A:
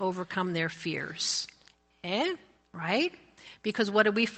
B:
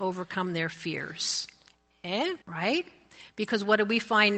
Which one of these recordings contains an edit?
B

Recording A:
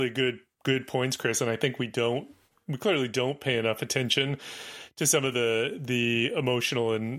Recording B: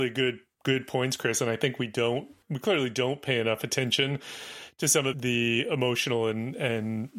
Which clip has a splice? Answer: B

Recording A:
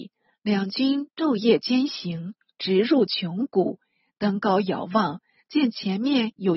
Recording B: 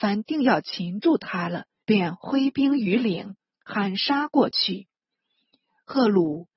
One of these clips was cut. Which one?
B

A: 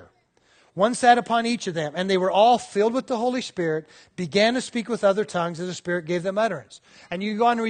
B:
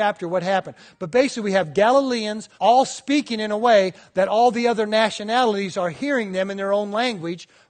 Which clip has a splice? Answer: B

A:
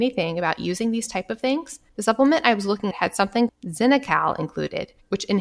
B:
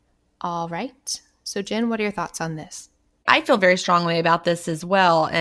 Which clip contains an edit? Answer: A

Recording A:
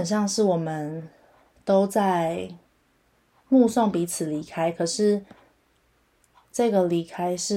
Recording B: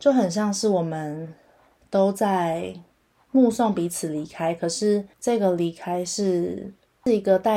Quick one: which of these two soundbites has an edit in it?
B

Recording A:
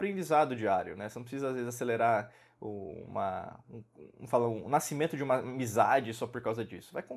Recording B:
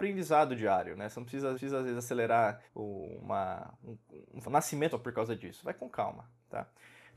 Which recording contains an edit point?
B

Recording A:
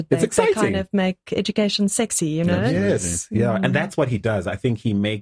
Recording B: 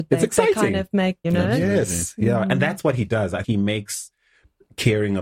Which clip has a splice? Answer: B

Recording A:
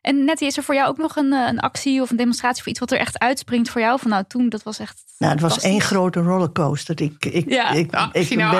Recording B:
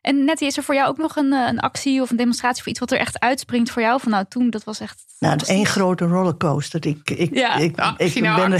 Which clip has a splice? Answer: B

